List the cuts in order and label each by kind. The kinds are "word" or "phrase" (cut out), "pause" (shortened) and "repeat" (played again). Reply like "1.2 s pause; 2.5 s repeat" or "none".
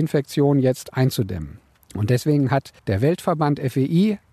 1.7 s pause; 2.8 s pause